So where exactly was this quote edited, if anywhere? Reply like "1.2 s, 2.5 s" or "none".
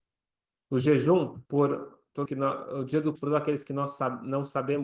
1.5 s, 2.3 s, 3.2 s